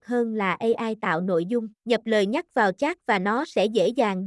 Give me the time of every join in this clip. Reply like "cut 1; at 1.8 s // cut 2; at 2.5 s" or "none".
cut 1; at 1.8 s

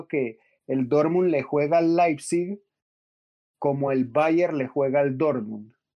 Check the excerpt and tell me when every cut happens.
none

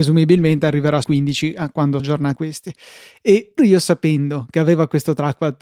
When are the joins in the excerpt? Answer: cut 1; at 1.0 s // cut 2; at 2.0 s // cut 3; at 2.4 s // cut 4; at 3.6 s

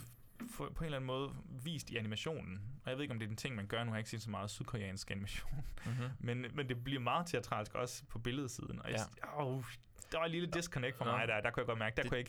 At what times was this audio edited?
none

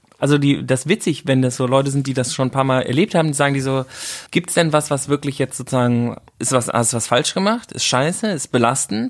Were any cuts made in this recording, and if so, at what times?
cut 1; at 4.3 s // cut 2; at 6.3 s

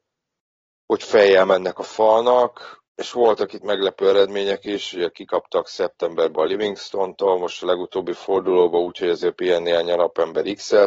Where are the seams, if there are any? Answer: cut 1; at 2.9 s

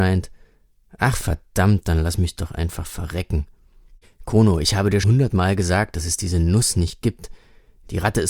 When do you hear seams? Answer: cut 1; at 5.0 s

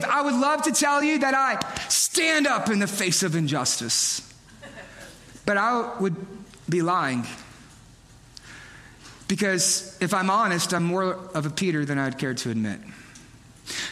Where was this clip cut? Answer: none

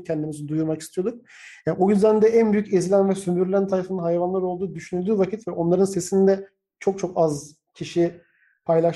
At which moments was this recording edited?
none

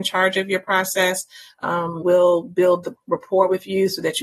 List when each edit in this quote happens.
cut 1; at 2.0 s

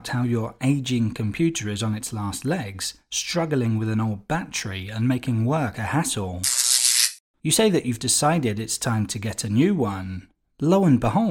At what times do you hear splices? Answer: cut 1; at 7.2 s

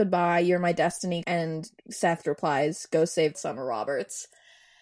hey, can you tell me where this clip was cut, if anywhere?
cut 1; at 1.2 s // cut 2; at 2.2 s // cut 3; at 3.3 s

